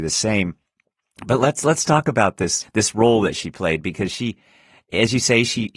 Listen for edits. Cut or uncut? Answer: cut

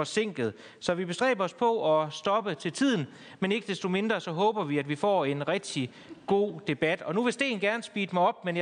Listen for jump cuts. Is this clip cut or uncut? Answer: uncut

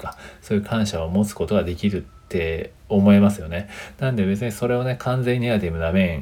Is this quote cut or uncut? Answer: cut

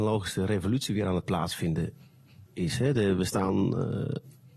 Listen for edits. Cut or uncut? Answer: cut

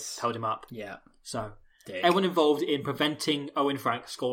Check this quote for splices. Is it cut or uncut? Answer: uncut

